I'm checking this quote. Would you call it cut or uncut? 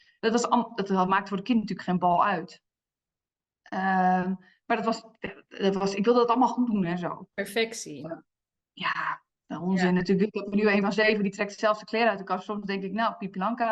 uncut